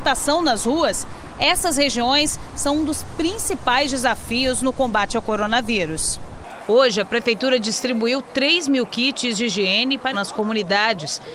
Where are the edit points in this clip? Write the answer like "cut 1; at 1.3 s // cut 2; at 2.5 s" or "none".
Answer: cut 1; at 10.1 s